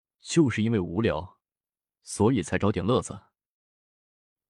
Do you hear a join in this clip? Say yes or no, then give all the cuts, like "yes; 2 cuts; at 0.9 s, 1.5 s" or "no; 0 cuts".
no; 0 cuts